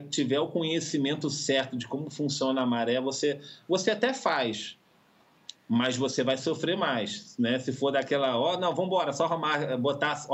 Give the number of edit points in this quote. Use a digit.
0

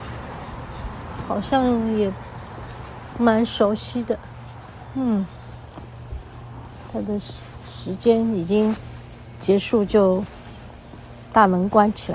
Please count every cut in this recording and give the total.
1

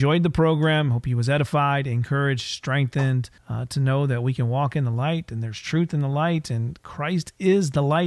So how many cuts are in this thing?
1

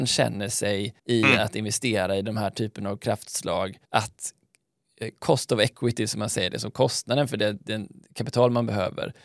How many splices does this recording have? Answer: 2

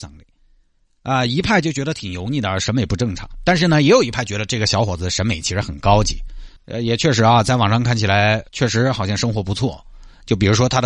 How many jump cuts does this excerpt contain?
2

